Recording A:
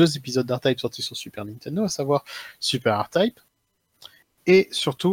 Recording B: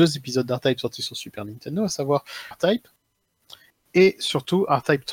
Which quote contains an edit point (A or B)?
B